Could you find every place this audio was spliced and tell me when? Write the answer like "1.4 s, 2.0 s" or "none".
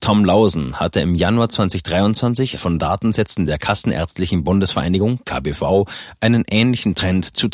2.6 s